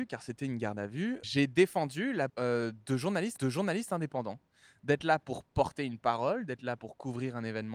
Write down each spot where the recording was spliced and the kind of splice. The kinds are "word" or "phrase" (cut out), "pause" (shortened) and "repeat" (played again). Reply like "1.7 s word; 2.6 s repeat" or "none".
1.2 s word; 2.3 s word; 3.4 s repeat